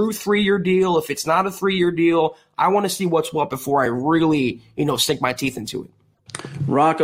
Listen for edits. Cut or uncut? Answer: uncut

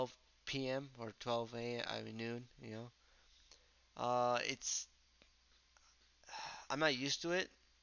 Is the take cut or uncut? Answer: uncut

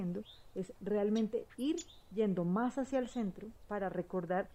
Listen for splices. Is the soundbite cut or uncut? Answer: uncut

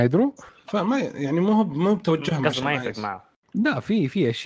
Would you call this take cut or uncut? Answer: uncut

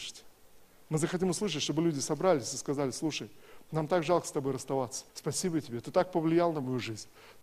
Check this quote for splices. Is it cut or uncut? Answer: cut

